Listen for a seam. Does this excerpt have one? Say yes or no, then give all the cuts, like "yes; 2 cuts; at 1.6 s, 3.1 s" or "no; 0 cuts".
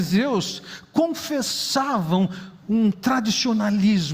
no; 0 cuts